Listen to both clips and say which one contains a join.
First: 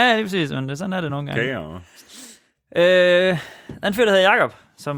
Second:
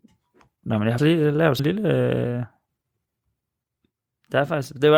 second; 2 cuts; at 1.0 s, 1.6 s

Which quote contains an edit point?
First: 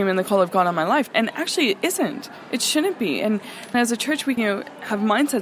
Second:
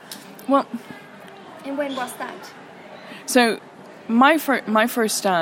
first; 3 cuts; at 1.1 s, 3.7 s, 4.4 s

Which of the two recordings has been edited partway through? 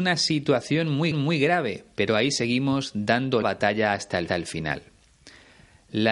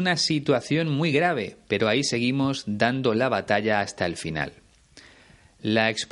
first; 3 cuts; at 1.1 s, 3.4 s, 4.3 s

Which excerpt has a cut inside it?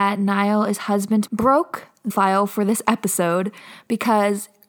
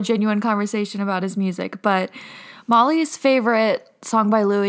first; 2 cuts; at 1.3 s, 2.1 s

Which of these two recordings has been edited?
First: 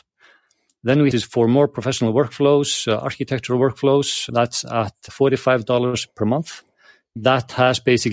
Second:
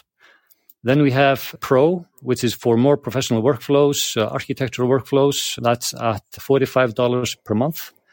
first; 1 cut; at 1.1 s

